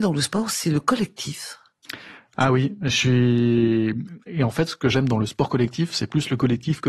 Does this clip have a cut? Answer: no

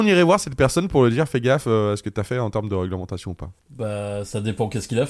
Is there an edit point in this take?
yes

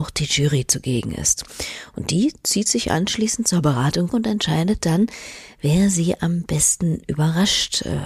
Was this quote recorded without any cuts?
no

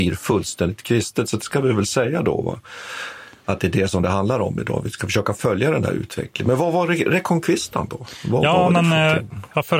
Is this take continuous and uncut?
yes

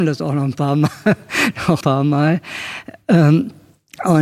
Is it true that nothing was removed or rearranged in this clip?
no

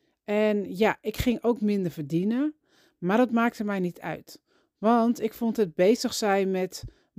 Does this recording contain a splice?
no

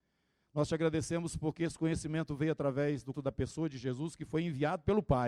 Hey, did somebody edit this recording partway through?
yes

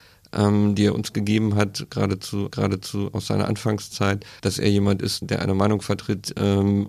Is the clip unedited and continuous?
no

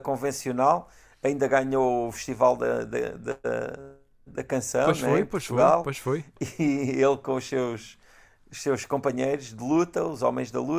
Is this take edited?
no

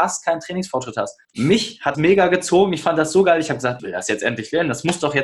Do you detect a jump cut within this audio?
yes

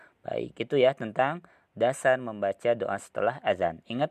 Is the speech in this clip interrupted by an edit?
no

